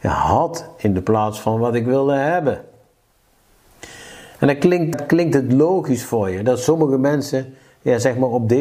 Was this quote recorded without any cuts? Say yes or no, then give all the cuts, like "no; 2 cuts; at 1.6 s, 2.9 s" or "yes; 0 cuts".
no; 1 cut; at 4.9 s